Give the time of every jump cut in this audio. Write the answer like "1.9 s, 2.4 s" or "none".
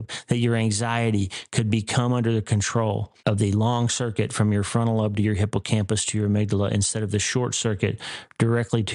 3.2 s